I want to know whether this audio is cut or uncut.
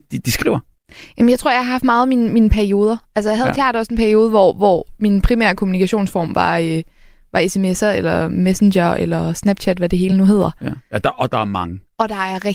uncut